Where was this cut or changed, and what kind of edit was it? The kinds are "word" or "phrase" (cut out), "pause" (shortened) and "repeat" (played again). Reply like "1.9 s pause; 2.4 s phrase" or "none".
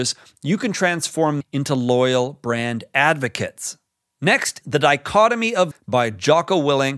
1.4 s word; 4.6 s word; 5.7 s word